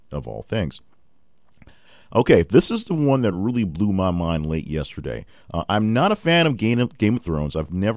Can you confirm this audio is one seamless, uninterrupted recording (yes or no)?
yes